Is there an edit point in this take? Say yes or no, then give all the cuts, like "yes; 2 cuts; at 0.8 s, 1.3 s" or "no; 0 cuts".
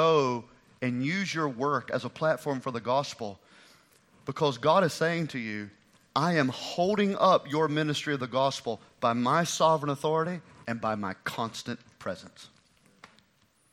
no; 0 cuts